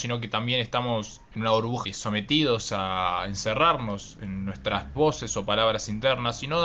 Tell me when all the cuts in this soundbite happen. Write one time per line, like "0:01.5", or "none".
0:01.8
0:05.0